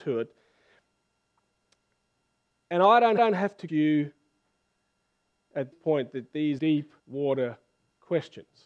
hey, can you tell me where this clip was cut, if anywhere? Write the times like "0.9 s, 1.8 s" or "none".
3.2 s, 3.7 s, 5.7 s, 6.6 s, 7.0 s